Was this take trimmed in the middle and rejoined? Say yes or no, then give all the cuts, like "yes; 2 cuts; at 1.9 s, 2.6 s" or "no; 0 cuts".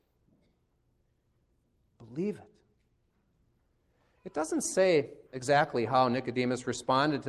yes; 1 cut; at 5.3 s